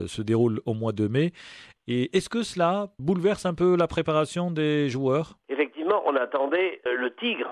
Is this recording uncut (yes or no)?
yes